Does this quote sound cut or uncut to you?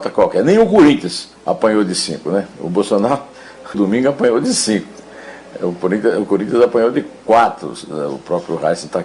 cut